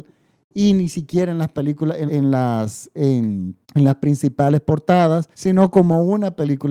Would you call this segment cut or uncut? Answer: cut